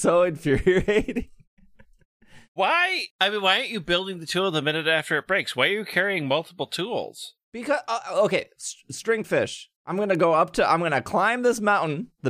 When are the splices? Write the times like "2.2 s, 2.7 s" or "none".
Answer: 3.1 s, 7.4 s, 9.8 s